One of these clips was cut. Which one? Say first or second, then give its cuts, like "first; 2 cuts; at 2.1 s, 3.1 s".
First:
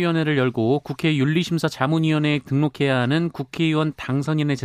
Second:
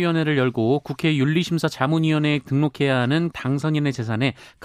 second; 1 cut; at 3.3 s